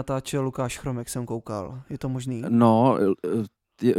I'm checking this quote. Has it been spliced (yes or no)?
no